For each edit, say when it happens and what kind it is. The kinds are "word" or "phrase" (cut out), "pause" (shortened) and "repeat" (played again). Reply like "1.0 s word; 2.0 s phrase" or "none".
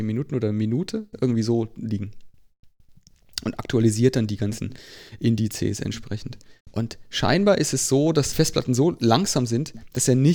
6.6 s pause; 8.3 s phrase